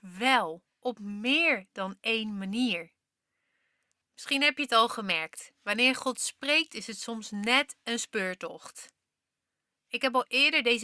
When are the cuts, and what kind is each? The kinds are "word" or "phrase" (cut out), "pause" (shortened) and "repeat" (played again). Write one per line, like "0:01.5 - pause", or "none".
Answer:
none